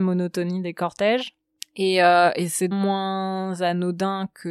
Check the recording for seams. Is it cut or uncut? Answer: cut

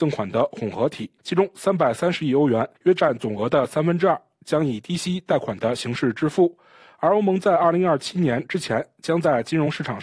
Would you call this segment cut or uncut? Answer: cut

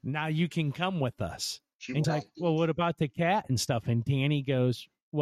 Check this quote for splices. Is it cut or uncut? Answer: cut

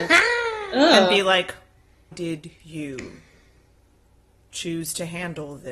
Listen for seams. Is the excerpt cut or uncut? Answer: cut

